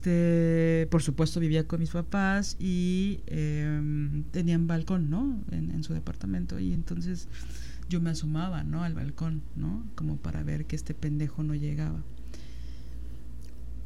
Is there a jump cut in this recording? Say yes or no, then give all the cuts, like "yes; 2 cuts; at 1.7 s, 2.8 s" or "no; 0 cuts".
no; 0 cuts